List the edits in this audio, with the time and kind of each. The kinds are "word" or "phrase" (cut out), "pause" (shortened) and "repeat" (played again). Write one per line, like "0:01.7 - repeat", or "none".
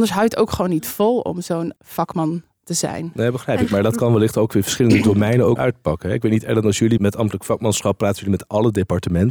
0:01.8 - word
0:05.6 - word
0:07.0 - word